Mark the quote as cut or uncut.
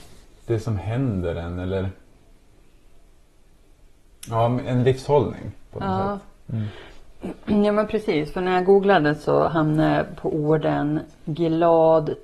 uncut